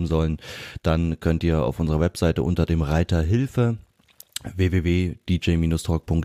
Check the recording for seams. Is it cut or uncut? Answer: uncut